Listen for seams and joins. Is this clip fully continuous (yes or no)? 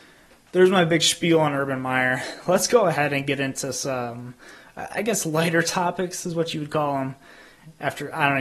yes